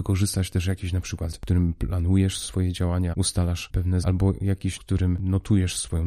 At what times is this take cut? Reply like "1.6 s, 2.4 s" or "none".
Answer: 1.3 s, 3.1 s, 4.0 s, 4.8 s